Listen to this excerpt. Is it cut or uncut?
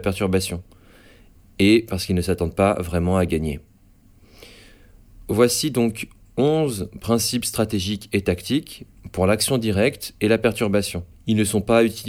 uncut